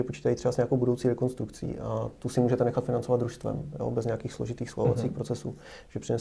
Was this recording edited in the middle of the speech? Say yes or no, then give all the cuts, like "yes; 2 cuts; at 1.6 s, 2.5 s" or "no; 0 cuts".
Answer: no; 0 cuts